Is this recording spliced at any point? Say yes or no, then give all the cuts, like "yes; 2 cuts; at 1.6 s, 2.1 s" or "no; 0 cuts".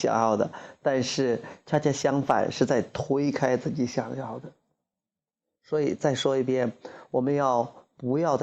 no; 0 cuts